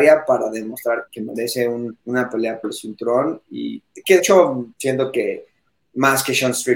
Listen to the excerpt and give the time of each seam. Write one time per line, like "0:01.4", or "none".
0:01.1
0:02.0
0:02.6
0:04.2
0:04.7